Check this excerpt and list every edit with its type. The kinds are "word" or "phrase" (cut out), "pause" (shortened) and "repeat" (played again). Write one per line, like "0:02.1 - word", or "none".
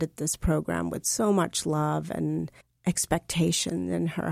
0:02.6 - pause